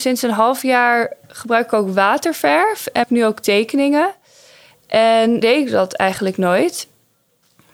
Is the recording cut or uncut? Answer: cut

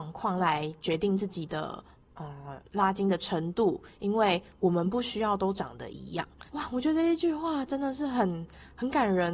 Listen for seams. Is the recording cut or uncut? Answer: cut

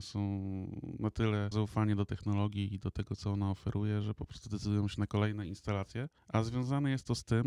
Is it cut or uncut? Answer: cut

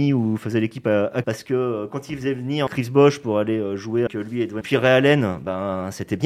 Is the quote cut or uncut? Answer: cut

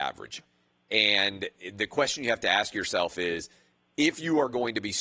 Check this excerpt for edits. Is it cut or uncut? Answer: uncut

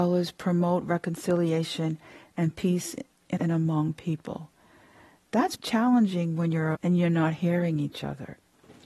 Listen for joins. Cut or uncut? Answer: cut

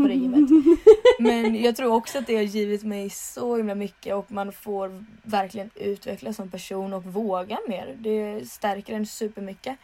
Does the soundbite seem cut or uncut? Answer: uncut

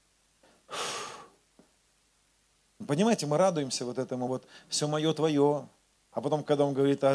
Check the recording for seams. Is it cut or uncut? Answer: uncut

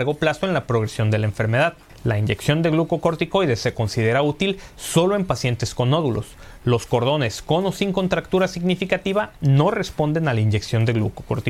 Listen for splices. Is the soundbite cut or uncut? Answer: uncut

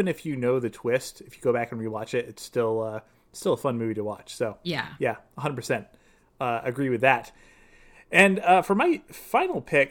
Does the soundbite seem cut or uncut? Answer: uncut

